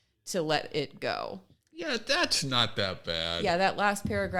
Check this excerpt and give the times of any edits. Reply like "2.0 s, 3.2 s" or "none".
none